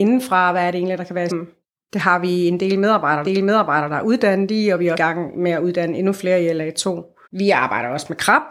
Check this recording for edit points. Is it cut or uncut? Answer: cut